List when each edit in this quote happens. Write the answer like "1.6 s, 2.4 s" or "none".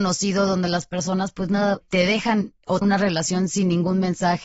1.8 s, 2.8 s